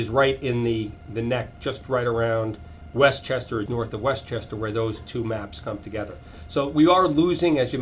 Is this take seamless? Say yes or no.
no